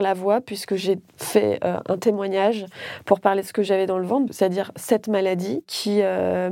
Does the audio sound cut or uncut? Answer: cut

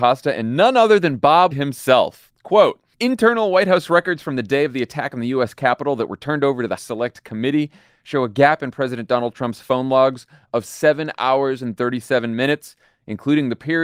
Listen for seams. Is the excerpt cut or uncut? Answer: cut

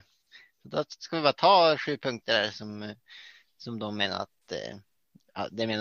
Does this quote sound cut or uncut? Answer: uncut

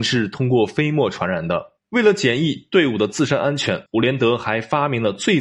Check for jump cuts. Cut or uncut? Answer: cut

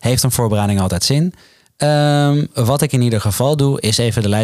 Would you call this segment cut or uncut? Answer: uncut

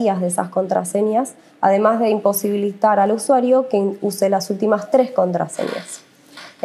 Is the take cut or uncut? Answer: uncut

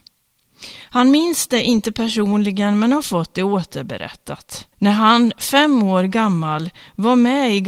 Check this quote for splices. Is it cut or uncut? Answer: cut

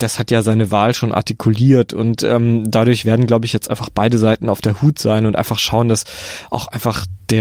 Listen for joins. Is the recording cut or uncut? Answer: uncut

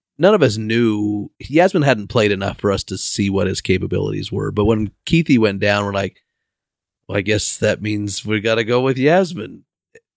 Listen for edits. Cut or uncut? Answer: cut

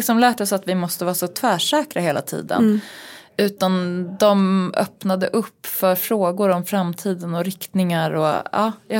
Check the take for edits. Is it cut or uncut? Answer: uncut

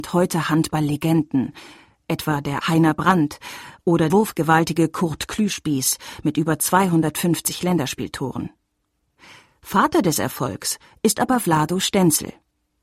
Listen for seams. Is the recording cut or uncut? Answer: cut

